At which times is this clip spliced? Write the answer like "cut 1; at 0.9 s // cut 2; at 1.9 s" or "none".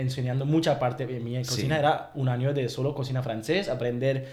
none